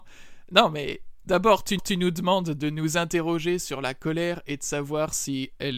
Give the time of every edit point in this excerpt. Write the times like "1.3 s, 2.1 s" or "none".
1.8 s